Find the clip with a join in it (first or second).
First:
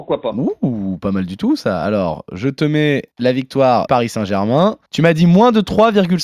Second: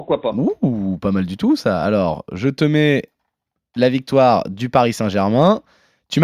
first